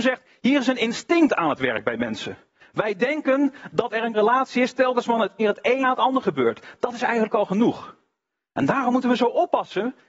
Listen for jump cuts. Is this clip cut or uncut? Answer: cut